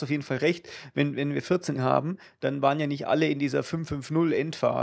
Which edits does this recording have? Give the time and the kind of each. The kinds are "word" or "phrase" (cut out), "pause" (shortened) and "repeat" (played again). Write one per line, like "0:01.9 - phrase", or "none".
0:01.7 - word